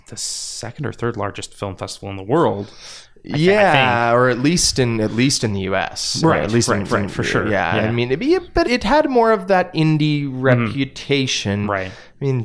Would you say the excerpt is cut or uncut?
cut